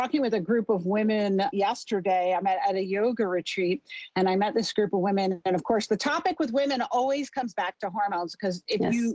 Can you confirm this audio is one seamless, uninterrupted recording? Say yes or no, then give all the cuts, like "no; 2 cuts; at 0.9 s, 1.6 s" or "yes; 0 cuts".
yes; 0 cuts